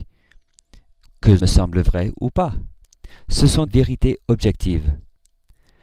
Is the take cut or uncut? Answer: cut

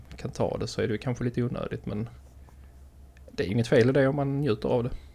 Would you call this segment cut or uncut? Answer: uncut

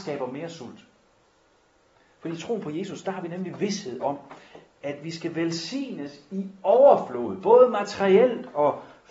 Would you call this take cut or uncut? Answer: uncut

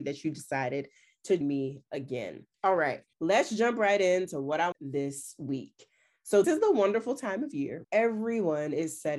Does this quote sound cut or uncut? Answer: cut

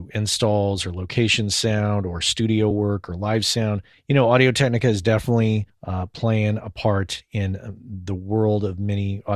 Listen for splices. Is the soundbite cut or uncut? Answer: uncut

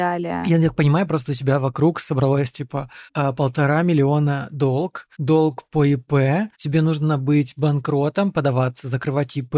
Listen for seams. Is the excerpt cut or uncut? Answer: cut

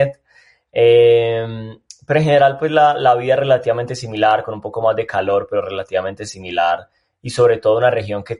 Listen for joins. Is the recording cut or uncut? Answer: uncut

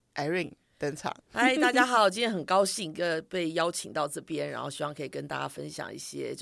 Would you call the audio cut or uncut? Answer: cut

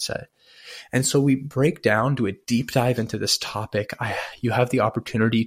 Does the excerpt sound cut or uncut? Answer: uncut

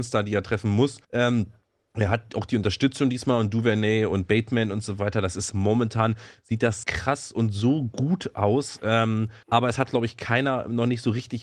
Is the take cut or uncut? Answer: cut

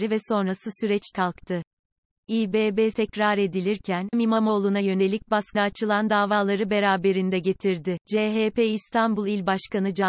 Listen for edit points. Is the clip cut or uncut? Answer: cut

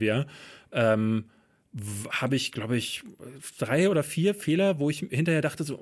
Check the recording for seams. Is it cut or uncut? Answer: uncut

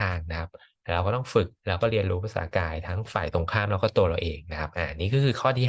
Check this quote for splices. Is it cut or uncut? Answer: cut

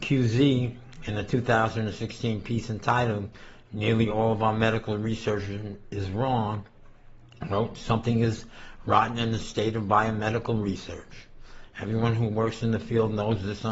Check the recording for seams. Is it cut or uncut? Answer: uncut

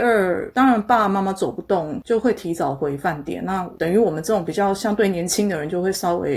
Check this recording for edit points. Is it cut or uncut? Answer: uncut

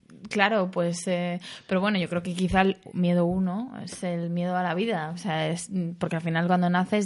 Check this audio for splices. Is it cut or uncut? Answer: uncut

